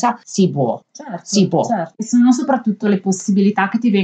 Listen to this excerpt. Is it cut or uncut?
uncut